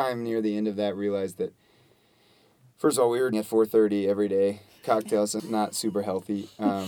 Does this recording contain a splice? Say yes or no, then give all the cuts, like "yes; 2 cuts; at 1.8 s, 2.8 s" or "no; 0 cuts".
yes; 2 cuts; at 3.3 s, 5.4 s